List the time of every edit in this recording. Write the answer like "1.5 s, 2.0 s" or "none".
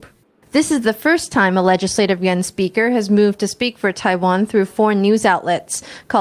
none